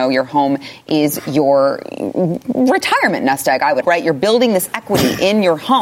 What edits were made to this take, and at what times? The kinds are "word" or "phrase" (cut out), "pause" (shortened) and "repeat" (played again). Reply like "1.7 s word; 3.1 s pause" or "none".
3.8 s word